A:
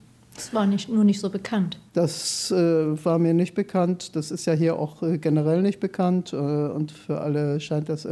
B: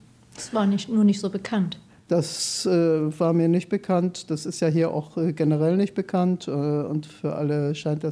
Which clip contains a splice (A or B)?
A